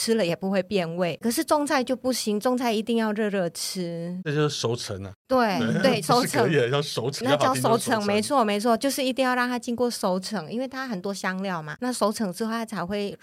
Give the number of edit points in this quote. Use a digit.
1